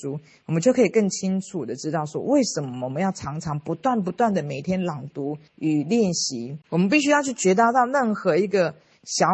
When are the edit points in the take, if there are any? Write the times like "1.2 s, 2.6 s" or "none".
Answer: 5.5 s, 6.6 s